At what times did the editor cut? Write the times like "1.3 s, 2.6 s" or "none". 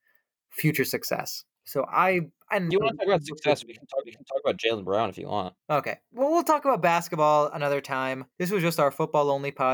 2.7 s, 4.0 s, 5.6 s, 8.3 s